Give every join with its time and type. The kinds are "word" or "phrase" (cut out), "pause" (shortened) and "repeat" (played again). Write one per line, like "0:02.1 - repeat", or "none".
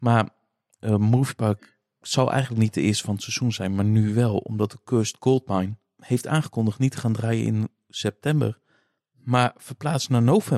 none